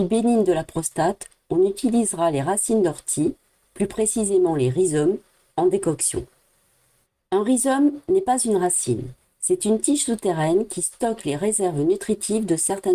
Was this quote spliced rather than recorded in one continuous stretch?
no; 0 cuts

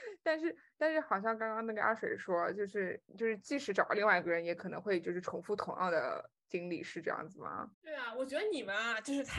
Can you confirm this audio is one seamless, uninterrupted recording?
no; 2 cuts; at 3.1 s, 7.7 s

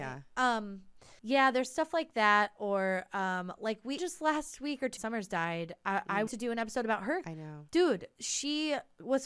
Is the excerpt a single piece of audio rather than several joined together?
no; 5 cuts; at 1.2 s, 4.0 s, 5.0 s, 6.3 s, 7.2 s

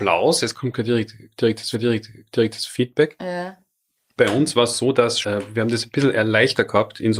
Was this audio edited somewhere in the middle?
yes; 3 cuts; at 1.7 s, 4.0 s, 5.2 s

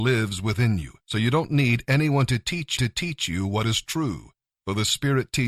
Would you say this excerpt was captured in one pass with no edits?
no; 3 cuts; at 1.0 s, 2.8 s, 4.4 s

